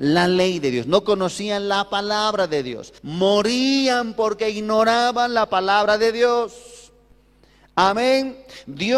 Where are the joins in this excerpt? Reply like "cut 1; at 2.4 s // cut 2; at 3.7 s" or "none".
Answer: cut 1; at 3.0 s

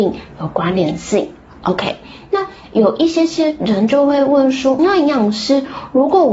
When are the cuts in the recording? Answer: cut 1; at 4.8 s

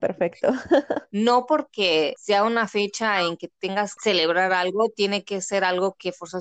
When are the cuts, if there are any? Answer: cut 1; at 4.0 s

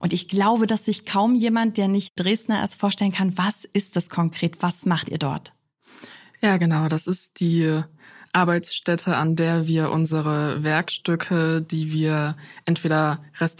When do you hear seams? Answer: none

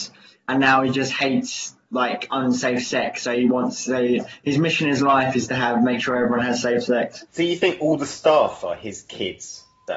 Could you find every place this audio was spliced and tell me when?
cut 1; at 7.3 s

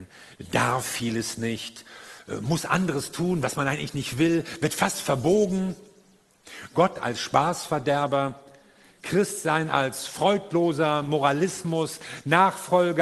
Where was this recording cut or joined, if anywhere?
none

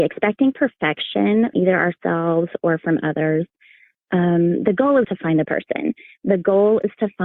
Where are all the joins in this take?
cut 1; at 1.5 s // cut 2; at 5.0 s // cut 3; at 5.4 s

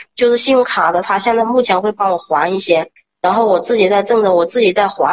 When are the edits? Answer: cut 1; at 3.0 s

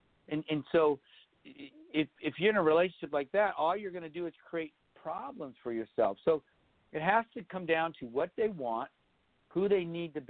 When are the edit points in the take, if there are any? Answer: none

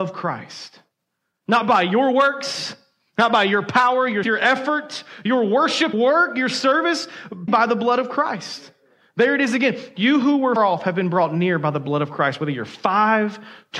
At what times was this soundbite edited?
cut 1; at 4.2 s // cut 2; at 5.9 s // cut 3; at 7.5 s // cut 4; at 10.6 s

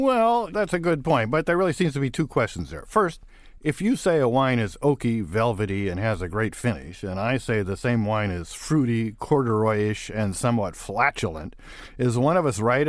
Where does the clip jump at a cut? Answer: none

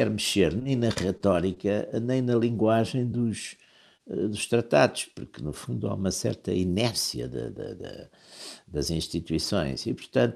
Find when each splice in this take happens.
none

